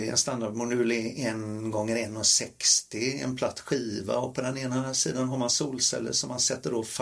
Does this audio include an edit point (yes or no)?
no